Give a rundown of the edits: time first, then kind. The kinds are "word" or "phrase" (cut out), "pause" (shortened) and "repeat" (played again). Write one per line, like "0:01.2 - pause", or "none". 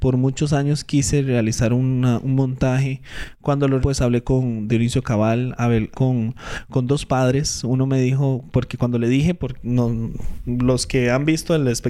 0:03.8 - word
0:04.7 - phrase
0:05.9 - word

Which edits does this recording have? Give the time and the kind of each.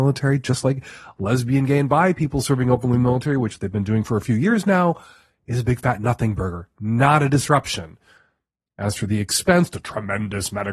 none

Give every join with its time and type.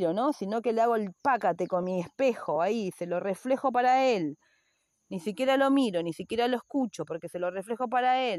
none

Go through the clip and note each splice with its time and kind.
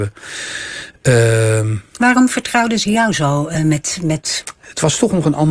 none

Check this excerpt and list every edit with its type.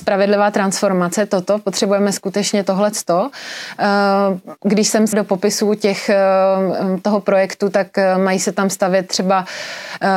0:04.6 - pause
0:05.1 - word

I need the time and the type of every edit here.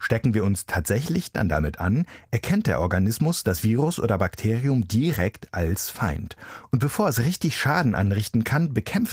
none

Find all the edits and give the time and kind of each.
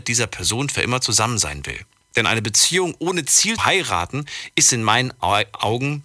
0:03.6 - word

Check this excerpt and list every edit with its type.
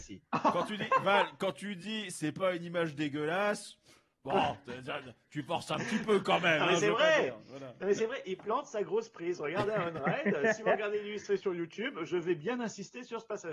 none

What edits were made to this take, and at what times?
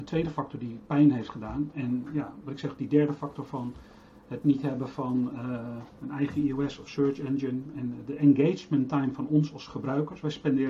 none

